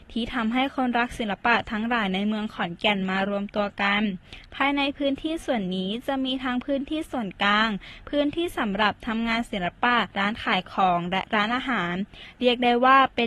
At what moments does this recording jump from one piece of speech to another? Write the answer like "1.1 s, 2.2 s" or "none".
10.1 s